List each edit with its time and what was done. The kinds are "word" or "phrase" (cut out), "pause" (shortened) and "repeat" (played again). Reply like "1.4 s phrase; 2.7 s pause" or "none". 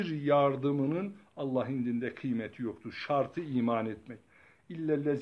none